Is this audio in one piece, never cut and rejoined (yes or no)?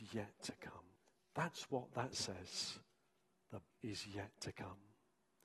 no